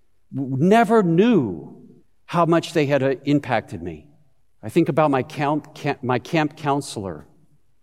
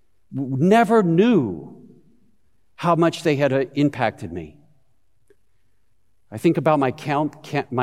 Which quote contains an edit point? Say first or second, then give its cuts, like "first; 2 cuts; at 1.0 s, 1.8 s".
first; 2 cuts; at 2.0 s, 4.4 s